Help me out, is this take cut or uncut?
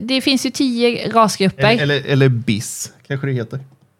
uncut